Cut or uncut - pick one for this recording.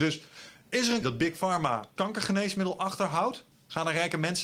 cut